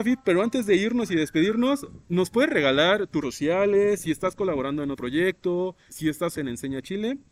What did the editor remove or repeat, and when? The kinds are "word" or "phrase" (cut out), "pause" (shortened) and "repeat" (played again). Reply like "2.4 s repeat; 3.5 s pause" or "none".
2.0 s pause; 3.2 s word; 4.9 s word; 5.9 s word; 6.3 s word